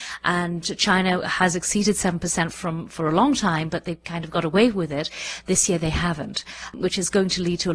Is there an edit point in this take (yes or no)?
no